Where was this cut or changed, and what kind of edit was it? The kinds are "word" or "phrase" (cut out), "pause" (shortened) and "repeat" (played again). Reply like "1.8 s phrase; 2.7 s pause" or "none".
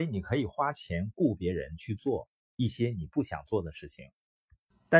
2.4 s pause